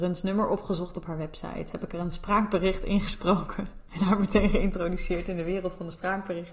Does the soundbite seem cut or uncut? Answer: uncut